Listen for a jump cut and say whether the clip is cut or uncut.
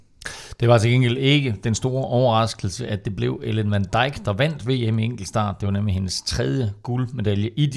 uncut